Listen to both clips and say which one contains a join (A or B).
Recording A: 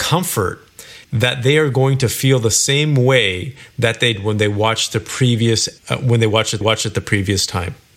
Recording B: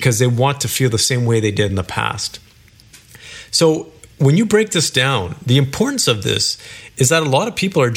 A